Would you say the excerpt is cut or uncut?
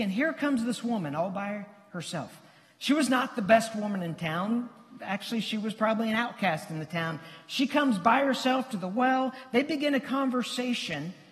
uncut